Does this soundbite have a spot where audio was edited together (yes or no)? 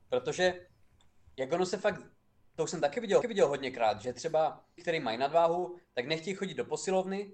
yes